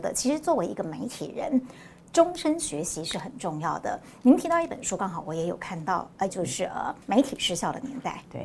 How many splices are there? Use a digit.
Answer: 2